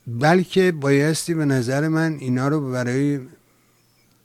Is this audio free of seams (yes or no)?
yes